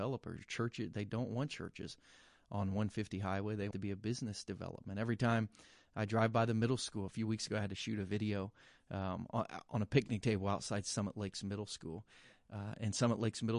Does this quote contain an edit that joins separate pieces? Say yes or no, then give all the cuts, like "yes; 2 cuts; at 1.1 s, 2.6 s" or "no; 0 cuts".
yes; 1 cut; at 3.7 s